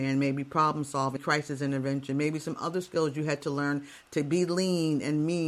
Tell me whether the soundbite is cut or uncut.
cut